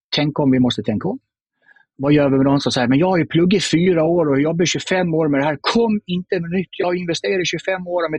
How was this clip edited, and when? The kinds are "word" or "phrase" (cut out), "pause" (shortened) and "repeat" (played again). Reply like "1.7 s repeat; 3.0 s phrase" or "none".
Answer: none